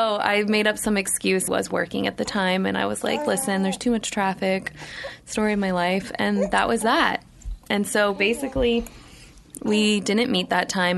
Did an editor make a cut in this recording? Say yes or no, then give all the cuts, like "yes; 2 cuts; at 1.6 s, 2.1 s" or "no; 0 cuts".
yes; 1 cut; at 1.5 s